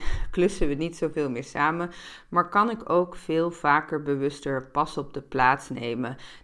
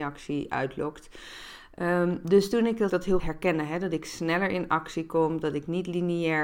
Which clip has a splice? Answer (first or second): second